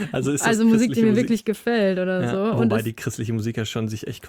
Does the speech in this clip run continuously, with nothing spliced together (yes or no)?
yes